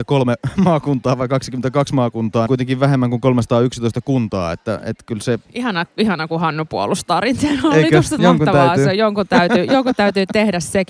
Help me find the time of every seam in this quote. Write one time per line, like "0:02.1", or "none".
0:02.5
0:05.4
0:08.2